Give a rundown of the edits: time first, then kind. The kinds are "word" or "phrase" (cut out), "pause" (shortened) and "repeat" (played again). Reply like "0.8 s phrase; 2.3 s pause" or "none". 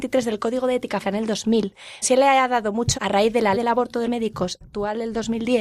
1.0 s word; 2.0 s word; 2.9 s word; 3.5 s word; 4.0 s word; 4.6 s word